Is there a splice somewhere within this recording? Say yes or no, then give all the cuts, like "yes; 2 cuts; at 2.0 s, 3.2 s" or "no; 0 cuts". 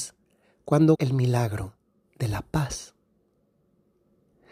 yes; 1 cut; at 0.9 s